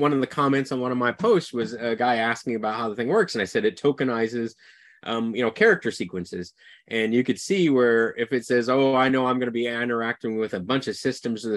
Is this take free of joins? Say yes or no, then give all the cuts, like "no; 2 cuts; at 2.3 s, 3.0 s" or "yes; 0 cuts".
yes; 0 cuts